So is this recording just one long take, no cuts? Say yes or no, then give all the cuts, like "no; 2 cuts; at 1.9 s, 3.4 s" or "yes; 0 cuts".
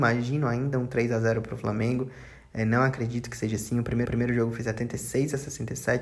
no; 1 cut; at 4.1 s